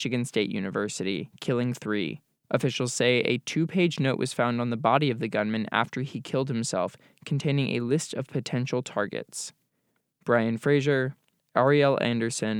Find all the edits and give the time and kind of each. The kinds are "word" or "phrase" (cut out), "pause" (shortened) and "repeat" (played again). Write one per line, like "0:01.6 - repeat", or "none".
none